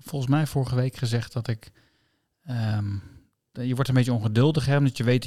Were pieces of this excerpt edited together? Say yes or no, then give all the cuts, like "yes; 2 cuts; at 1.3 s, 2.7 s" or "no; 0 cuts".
no; 0 cuts